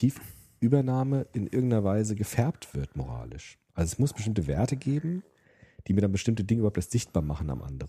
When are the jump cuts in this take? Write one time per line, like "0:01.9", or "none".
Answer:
none